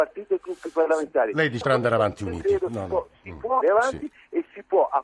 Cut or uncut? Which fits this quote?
cut